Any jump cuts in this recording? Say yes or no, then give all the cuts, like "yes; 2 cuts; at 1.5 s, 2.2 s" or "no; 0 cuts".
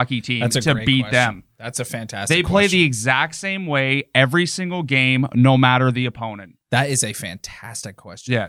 no; 0 cuts